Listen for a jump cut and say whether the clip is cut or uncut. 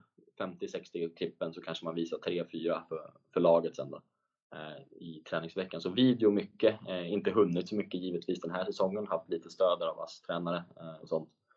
uncut